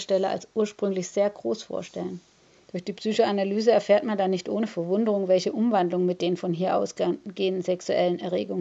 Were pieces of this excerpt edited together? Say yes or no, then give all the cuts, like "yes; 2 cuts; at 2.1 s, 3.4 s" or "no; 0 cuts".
no; 0 cuts